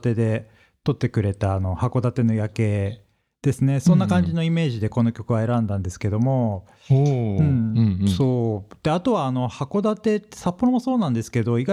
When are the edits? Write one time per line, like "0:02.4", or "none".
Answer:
none

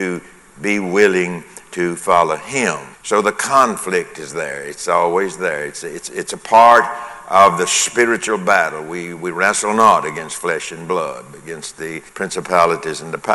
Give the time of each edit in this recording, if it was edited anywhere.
0:02.9
0:12.1

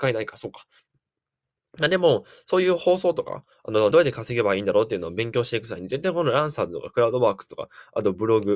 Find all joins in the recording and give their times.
0:03.9

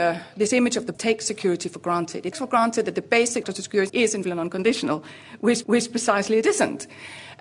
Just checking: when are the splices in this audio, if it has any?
0:00.9
0:02.3
0:03.4
0:03.9
0:04.2
0:05.6

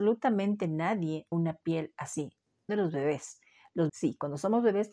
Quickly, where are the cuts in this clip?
0:01.3
0:02.7
0:03.9

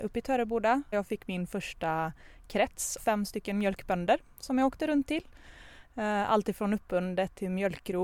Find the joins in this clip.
0:00.9
0:03.0

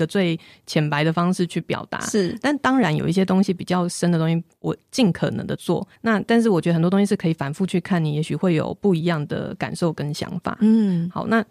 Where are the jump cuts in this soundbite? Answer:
0:06.0

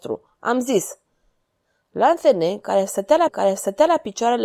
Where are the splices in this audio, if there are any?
0:03.3

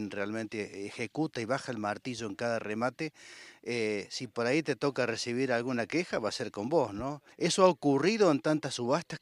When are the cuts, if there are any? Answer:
0:07.3

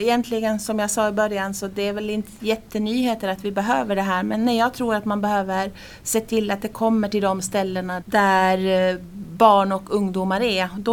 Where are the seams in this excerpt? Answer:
0:08.0

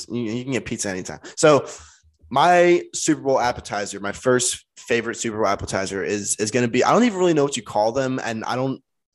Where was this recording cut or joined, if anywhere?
none

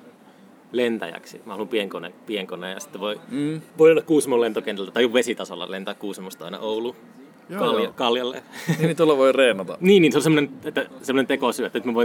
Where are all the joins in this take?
0:03.7

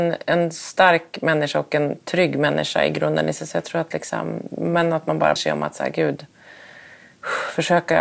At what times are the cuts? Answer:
0:05.4

